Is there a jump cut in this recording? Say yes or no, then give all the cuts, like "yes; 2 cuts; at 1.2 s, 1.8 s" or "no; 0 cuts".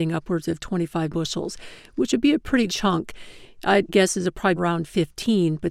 yes; 4 cuts; at 1.1 s, 2.7 s, 3.9 s, 4.6 s